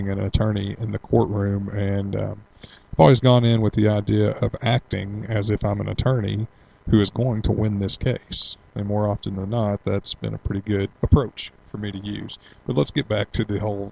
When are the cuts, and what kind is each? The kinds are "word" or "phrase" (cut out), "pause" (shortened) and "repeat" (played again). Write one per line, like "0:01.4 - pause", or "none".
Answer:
0:10.9 - pause

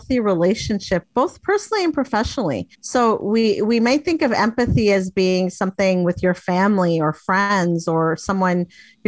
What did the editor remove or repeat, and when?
0:02.7 - pause

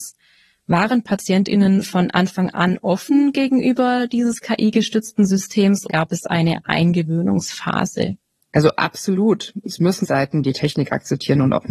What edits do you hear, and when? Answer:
0:05.9 - word
0:10.0 - phrase

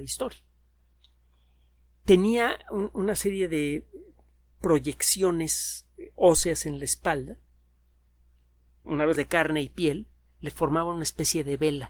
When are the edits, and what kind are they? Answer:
0:08.8 - word
0:09.2 - word

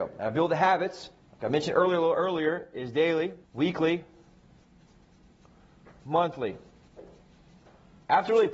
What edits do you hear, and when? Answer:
0:01.2 - pause
0:03.4 - pause

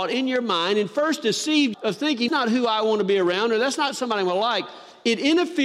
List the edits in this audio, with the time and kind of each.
0:01.7 - word
0:02.3 - word

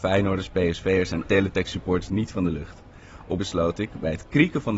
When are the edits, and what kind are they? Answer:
0:01.2 - word
0:02.1 - word
0:03.4 - word

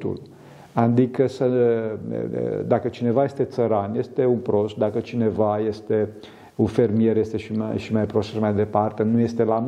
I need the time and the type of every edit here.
none

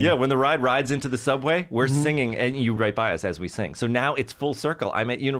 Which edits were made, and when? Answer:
0:02.8 - word

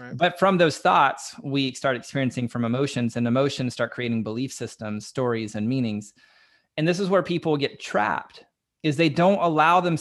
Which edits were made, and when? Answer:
none

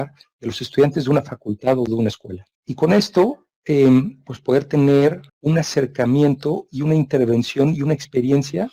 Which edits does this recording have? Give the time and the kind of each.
0:02.5 - pause
0:05.3 - pause

